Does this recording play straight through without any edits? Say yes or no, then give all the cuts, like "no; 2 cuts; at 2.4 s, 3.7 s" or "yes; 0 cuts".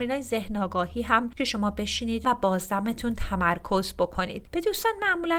no; 2 cuts; at 1.4 s, 2.2 s